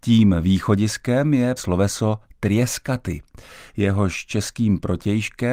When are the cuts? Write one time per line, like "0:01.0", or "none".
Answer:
0:01.6